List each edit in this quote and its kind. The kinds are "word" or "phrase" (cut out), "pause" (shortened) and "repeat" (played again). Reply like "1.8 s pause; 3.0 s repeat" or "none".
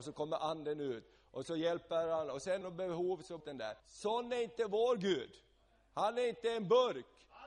2.6 s phrase; 3.4 s phrase; 3.8 s pause